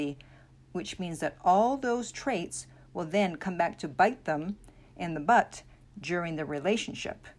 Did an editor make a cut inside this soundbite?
no; 0 cuts

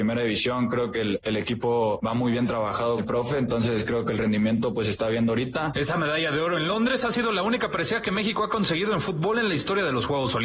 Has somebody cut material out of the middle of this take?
yes; 1 cut; at 3.0 s

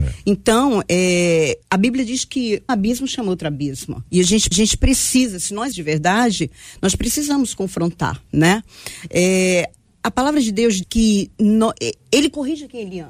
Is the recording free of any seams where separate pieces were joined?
no; 8 cuts; at 1.6 s, 2.7 s, 4.1 s, 4.5 s, 5.7 s, 9.8 s, 10.8 s, 12.0 s

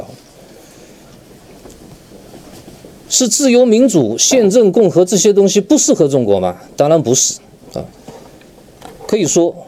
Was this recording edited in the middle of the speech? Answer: no; 0 cuts

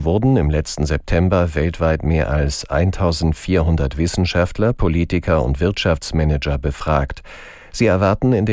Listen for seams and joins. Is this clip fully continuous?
yes; 0 cuts

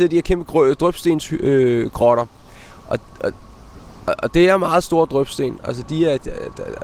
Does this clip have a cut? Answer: no; 0 cuts

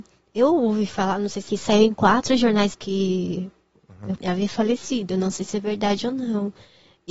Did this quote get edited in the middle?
yes; 3 cuts; at 1.5 s, 2.7 s, 4.2 s

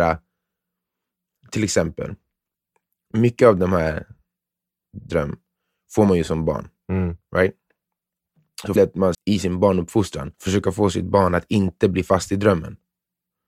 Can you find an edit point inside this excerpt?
yes; 4 cuts; at 5.1 s, 8.8 s, 9.1 s, 10.3 s

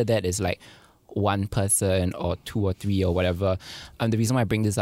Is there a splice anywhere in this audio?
no; 0 cuts

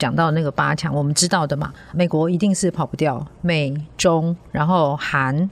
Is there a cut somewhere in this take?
yes; 1 cut; at 1.9 s

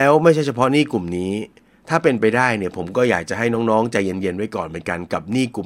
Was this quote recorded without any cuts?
yes; 0 cuts

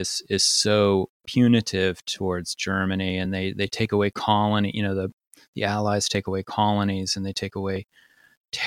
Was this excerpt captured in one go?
yes; 0 cuts

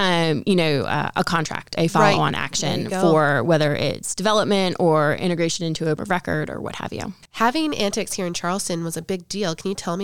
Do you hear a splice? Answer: yes; 3 cuts; at 1.8 s, 6.0 s, 7.2 s

